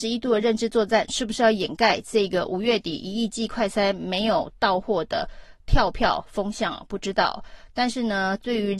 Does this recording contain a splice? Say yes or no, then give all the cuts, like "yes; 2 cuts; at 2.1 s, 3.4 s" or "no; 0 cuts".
no; 0 cuts